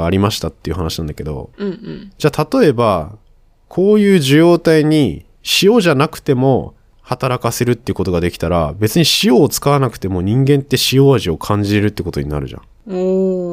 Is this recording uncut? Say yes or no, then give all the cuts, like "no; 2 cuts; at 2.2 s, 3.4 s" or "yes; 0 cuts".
no; 1 cut; at 1.5 s